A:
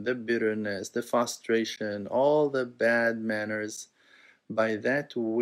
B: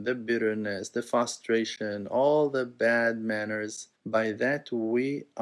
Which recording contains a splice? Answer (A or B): B